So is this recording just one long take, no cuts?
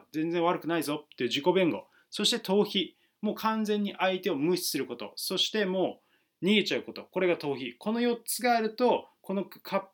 yes; 0 cuts

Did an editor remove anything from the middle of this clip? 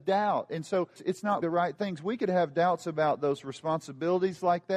yes; 2 cuts; at 1.0 s, 1.4 s

